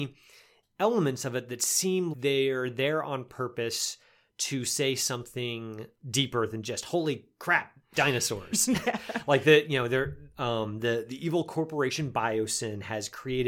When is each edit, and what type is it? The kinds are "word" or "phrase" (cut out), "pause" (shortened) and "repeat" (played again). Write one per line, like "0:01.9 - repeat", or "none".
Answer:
0:02.1 - word
0:06.0 - word